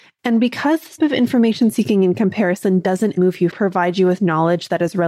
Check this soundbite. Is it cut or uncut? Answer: cut